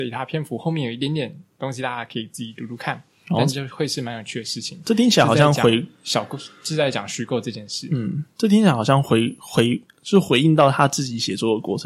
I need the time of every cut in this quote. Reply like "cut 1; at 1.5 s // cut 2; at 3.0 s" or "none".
cut 1; at 9.9 s